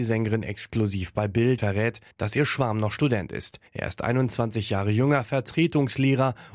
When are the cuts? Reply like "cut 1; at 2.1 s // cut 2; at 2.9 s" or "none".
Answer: cut 1; at 1.6 s // cut 2; at 2.1 s // cut 3; at 3.7 s